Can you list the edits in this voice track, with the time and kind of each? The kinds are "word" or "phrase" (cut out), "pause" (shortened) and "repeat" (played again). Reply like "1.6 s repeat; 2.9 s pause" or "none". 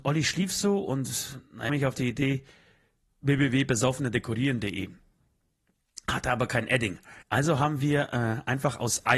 1.7 s phrase; 7.2 s pause

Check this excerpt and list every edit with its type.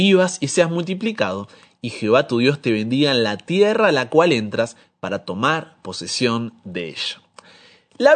none

